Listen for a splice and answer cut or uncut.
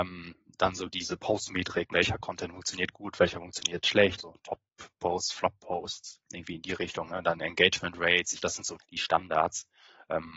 cut